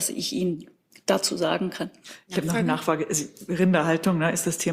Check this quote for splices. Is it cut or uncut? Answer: uncut